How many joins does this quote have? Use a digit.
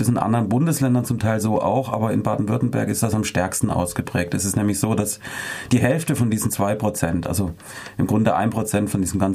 0